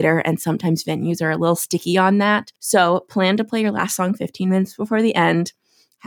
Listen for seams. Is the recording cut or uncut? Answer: cut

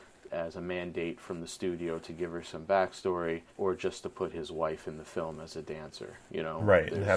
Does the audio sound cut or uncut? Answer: cut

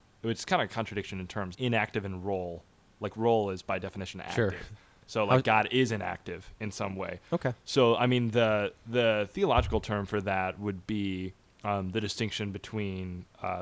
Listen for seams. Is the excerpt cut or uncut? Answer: cut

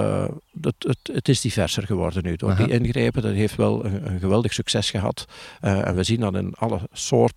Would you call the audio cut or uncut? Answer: uncut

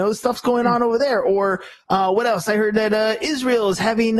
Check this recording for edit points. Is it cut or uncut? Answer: uncut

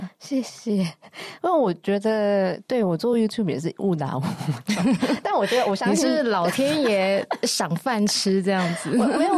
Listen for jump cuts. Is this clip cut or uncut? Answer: uncut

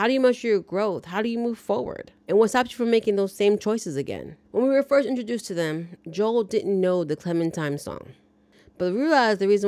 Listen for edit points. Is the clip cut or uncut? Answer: cut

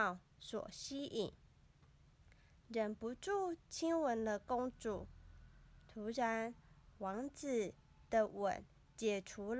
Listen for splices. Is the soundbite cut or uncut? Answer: uncut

